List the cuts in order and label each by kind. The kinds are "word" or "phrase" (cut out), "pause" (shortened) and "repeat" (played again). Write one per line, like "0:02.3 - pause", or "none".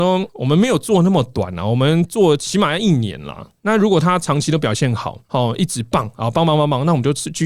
0:03.6 - pause
0:05.2 - pause